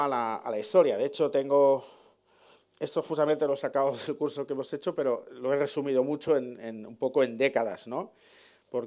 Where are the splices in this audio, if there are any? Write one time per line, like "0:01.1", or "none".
none